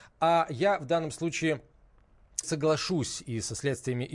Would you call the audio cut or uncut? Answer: cut